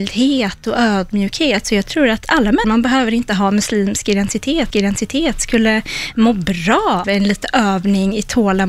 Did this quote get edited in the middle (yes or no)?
yes